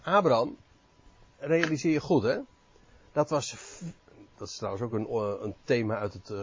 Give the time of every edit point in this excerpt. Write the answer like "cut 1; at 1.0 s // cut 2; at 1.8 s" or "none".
none